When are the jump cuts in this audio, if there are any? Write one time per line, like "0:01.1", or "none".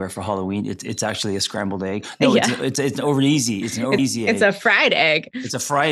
0:04.0

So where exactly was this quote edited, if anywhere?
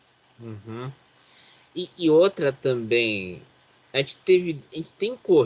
none

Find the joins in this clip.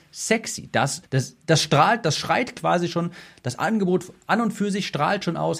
0:01.0

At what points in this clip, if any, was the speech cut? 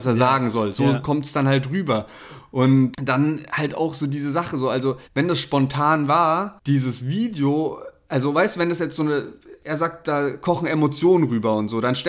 0:05.0

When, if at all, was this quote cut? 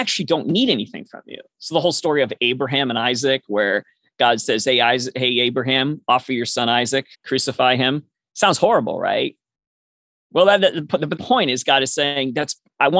0:07.1
0:11.2

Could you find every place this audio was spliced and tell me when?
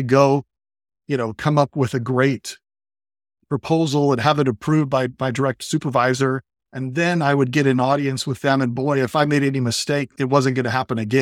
none

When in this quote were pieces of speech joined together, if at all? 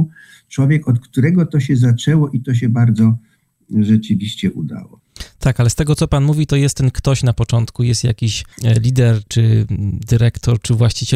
0:08.5

